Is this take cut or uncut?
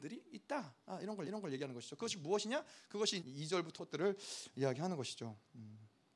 cut